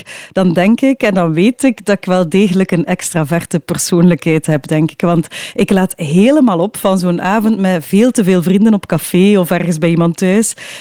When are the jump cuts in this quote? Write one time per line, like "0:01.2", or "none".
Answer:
none